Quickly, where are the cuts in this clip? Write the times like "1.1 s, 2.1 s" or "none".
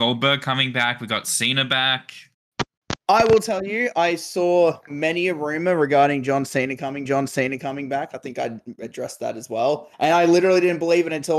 7.1 s, 9.9 s